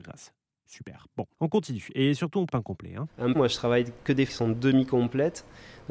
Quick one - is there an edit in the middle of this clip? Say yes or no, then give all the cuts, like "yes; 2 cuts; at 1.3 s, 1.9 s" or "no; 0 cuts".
yes; 4 cuts; at 1.3 s, 2.5 s, 3.3 s, 4.3 s